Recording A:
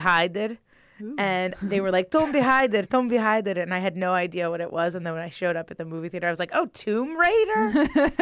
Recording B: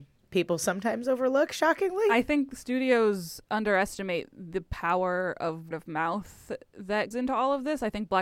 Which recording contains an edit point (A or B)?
B